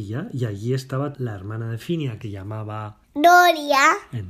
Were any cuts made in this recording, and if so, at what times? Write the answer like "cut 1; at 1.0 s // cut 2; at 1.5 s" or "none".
cut 1; at 1.1 s // cut 2; at 2.2 s // cut 3; at 3.0 s